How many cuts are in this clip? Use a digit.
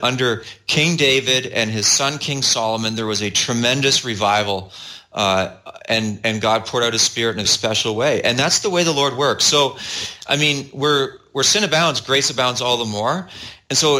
2